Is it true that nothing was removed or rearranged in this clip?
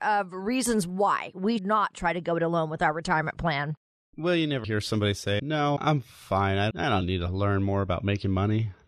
no; 5 cuts; at 1.6 s, 4.6 s, 5.4 s, 5.8 s, 6.7 s

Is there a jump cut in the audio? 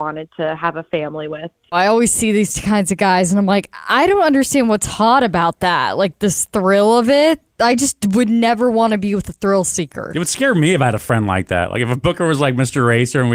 no; 0 cuts

